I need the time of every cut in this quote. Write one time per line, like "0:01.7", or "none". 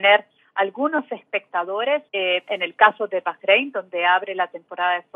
0:02.1